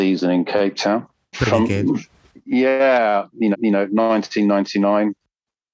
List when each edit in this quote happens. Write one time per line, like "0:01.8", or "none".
0:01.3
0:03.5